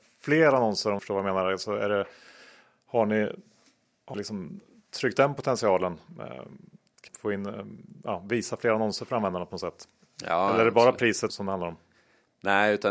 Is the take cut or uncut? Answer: cut